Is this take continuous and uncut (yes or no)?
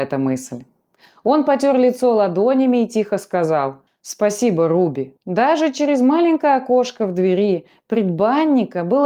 no